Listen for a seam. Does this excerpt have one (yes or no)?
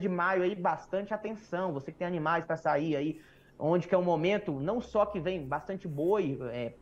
no